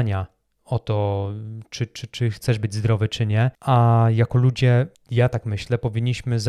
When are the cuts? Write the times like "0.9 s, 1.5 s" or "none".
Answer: none